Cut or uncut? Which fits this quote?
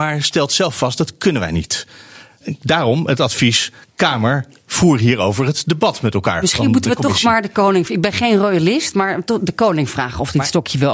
uncut